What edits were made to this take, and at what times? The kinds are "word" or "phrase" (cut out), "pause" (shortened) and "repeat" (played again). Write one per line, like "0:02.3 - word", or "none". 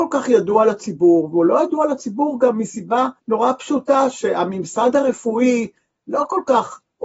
0:03.2 - pause